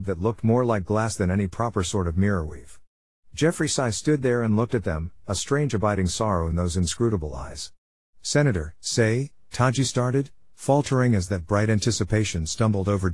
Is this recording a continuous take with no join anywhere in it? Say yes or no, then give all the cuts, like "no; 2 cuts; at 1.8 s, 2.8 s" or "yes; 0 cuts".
no; 1 cut; at 8.8 s